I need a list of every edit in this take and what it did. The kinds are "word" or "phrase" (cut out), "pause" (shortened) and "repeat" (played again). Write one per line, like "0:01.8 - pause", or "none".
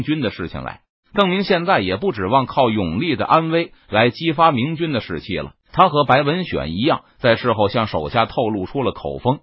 0:05.6 - pause